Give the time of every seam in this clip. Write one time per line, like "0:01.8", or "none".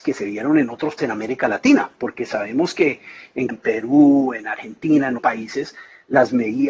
0:01.0
0:03.5
0:05.2